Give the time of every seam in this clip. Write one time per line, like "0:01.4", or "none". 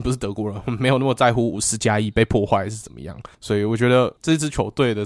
0:03.3